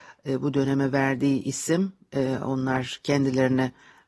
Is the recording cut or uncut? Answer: uncut